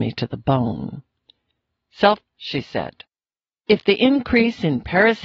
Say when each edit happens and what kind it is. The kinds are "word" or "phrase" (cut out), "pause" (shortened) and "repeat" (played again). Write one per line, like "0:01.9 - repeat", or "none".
0:02.2 - word